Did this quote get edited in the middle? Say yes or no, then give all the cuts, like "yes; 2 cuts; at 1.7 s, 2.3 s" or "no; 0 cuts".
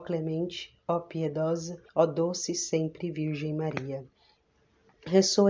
yes; 1 cut; at 1.9 s